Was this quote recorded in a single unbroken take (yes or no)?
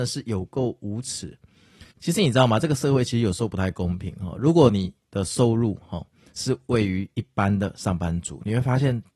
no